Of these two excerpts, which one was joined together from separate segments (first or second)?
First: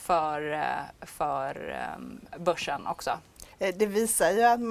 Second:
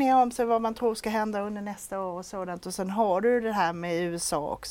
first